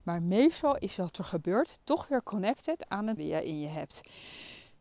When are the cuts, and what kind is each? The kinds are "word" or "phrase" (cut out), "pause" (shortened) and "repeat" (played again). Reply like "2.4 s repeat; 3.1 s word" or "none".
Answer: 1.1 s word; 3.2 s word